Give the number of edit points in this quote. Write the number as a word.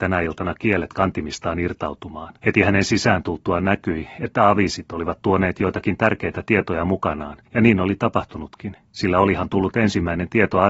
three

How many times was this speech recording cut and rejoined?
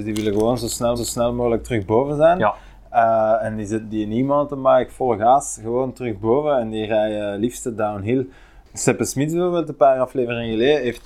one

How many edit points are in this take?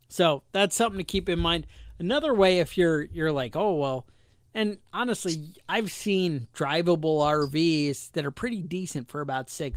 zero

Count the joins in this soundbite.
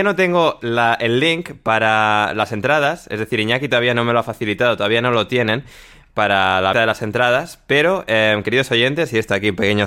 one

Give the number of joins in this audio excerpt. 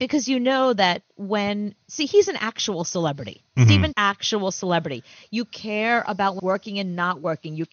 three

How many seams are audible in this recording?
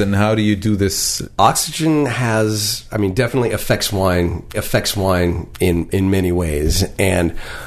one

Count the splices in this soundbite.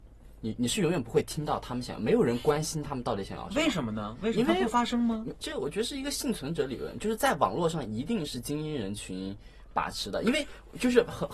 one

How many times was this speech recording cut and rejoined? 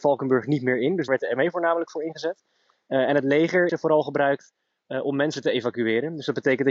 two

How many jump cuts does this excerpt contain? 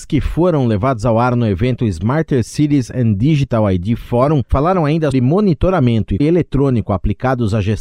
two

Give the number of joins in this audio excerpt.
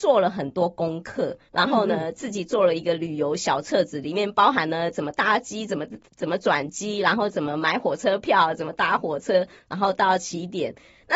two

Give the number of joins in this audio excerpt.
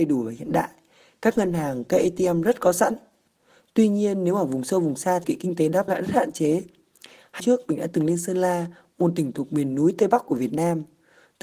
three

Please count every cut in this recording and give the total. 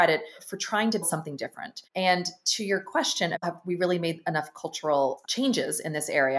one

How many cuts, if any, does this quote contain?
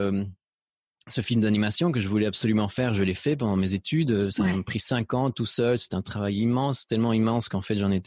zero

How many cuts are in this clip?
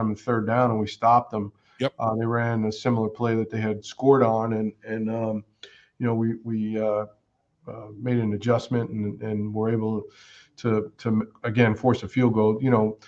zero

